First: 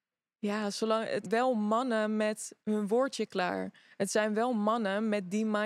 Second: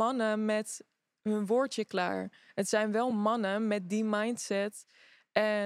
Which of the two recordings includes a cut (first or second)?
first